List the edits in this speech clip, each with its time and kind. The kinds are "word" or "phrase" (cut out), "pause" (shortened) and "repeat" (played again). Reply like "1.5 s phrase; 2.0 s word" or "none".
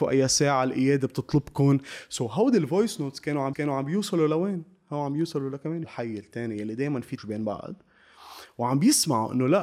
3.5 s repeat; 5.8 s phrase; 7.2 s word